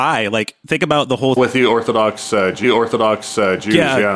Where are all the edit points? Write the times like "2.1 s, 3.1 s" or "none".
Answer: 1.4 s, 2.6 s